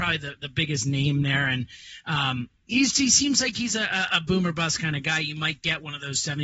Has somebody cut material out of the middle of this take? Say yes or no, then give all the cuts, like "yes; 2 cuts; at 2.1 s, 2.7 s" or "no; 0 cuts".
yes; 1 cut; at 2.9 s